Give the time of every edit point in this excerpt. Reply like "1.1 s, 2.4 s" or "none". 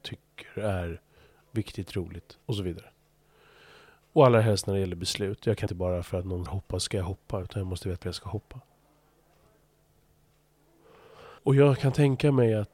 2.4 s, 5.7 s, 6.5 s, 8.0 s, 11.4 s